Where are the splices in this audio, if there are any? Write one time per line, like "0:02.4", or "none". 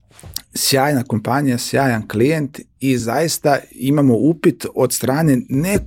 none